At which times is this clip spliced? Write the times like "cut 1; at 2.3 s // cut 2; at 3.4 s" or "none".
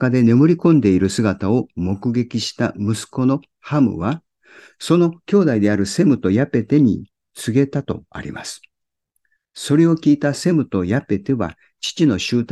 none